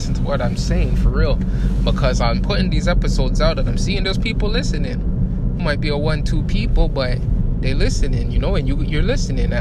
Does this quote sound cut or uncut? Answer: cut